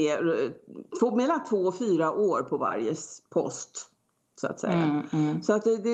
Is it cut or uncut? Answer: uncut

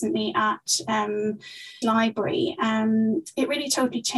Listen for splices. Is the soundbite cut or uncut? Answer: cut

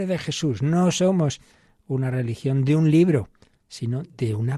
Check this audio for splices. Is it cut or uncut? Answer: uncut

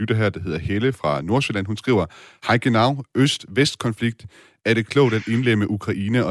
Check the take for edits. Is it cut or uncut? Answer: uncut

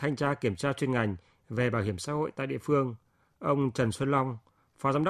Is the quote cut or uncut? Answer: uncut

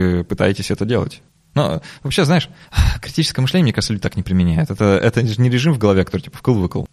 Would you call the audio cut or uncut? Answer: uncut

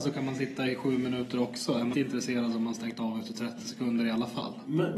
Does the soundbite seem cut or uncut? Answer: cut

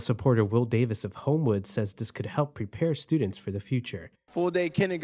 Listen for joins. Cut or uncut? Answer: uncut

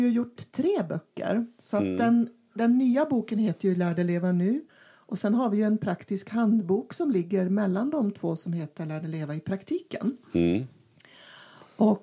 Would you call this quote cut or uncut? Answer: cut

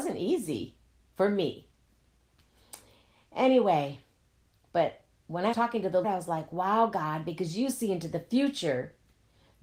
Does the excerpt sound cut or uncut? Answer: cut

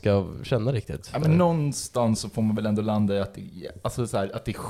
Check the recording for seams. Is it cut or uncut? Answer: uncut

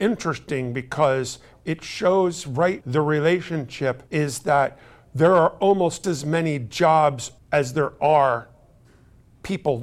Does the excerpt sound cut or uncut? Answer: cut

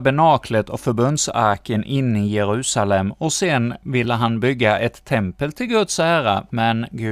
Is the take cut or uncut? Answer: uncut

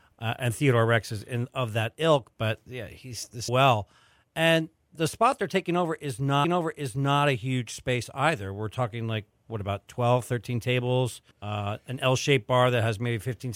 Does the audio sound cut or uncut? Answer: cut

